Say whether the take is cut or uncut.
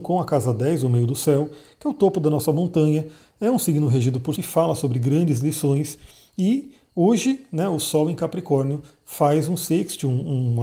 cut